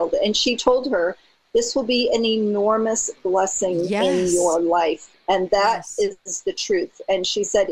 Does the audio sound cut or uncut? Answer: uncut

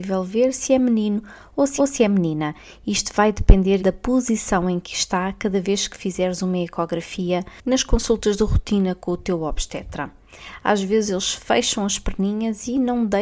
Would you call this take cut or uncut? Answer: cut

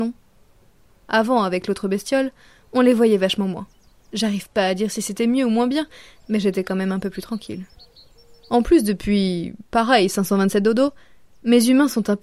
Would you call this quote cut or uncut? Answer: cut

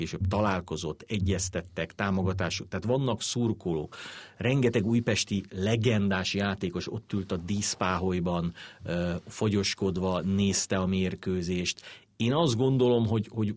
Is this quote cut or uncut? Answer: uncut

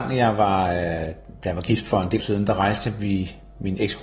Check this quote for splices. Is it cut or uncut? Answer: cut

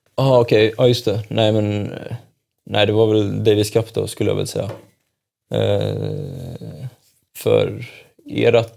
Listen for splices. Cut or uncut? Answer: uncut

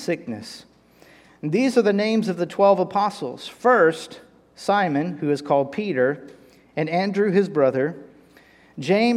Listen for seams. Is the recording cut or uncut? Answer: uncut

